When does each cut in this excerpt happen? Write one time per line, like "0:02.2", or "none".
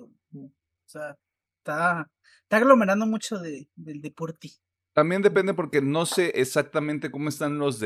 none